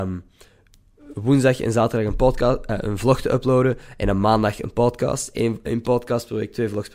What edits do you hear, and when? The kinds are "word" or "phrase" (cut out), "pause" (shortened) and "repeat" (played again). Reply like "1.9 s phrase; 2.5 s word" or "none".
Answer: none